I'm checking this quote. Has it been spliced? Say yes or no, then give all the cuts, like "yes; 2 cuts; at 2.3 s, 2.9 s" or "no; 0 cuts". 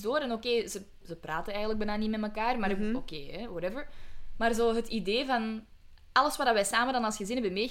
no; 0 cuts